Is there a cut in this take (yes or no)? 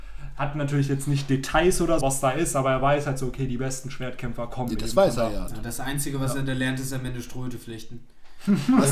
yes